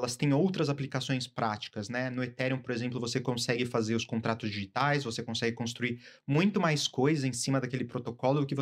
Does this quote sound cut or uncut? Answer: uncut